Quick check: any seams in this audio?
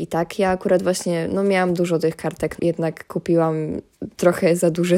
yes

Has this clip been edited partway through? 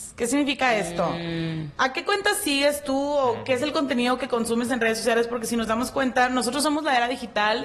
no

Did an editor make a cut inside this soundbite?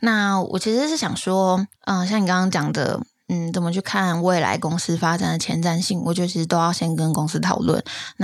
yes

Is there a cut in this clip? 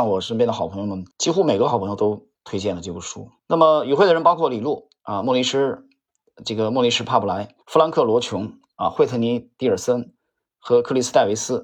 yes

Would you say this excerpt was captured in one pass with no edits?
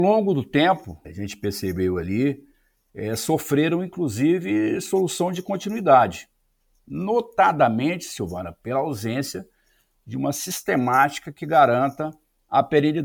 no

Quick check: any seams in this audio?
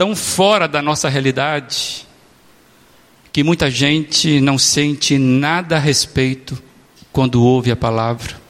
no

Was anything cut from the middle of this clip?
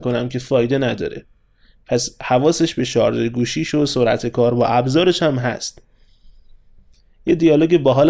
no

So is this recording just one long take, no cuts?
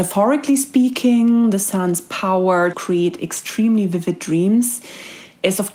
no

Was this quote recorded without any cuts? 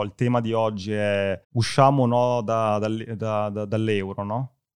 no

